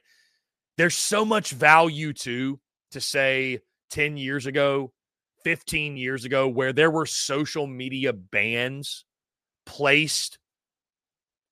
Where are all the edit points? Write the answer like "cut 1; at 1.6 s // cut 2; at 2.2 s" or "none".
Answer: none